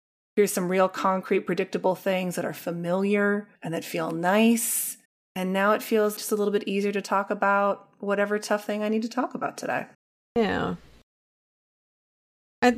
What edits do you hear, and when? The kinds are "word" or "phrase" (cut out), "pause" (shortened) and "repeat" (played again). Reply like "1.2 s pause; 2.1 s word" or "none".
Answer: 3.5 s pause; 5.0 s pause; 6.2 s word; 9.9 s pause